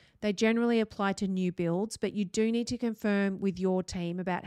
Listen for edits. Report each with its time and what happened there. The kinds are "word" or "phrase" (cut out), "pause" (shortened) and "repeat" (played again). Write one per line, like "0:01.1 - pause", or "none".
none